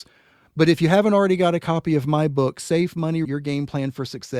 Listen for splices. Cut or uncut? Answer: cut